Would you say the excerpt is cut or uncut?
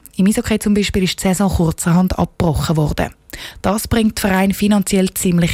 uncut